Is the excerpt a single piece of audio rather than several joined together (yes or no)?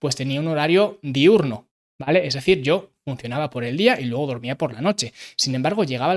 yes